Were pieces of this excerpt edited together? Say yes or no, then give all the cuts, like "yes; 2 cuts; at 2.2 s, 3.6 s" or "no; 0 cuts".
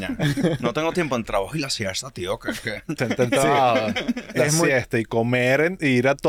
yes; 2 cuts; at 1.3 s, 3.0 s